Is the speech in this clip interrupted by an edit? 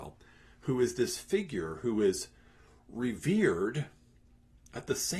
no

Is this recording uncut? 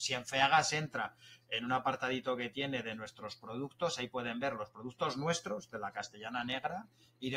yes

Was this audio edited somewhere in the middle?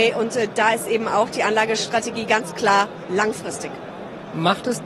no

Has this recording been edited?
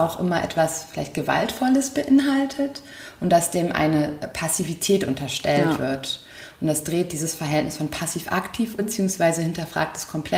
yes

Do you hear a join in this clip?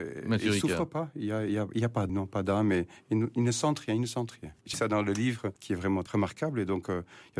yes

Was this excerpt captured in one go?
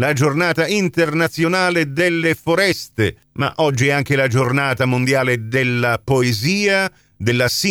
yes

